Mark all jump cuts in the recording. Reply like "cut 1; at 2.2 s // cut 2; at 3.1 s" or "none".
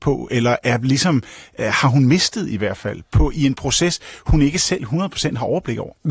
none